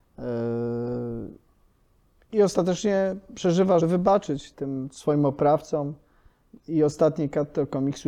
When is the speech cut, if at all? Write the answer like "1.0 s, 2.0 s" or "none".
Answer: 3.8 s, 4.5 s

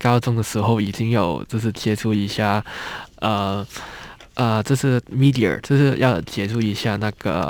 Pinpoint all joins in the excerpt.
none

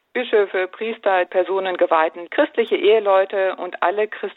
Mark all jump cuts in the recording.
1.3 s, 2.3 s

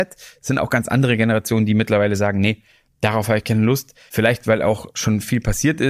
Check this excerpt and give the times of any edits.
none

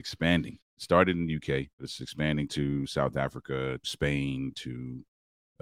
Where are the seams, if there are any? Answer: 1.7 s, 3.8 s

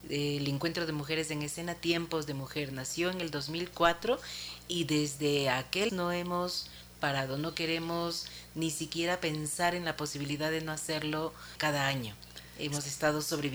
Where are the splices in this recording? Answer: 5.9 s, 11.6 s

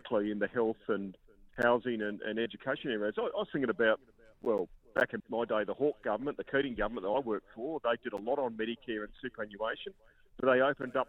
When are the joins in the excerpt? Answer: 5.2 s

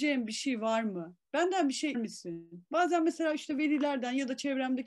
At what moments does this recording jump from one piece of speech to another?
1.2 s, 1.9 s

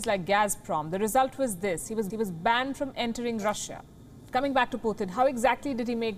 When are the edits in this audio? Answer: 2.1 s

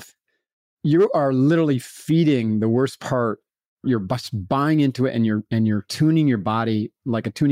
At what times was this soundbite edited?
none

